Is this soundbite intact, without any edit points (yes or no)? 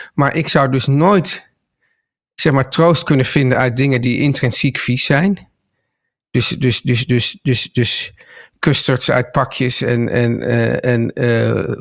yes